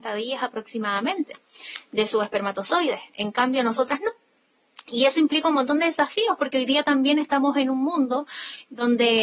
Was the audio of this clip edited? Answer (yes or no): no